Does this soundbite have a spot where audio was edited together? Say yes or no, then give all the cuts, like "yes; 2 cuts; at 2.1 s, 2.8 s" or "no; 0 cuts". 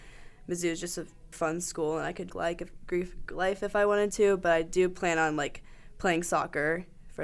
yes; 2 cuts; at 1.3 s, 2.3 s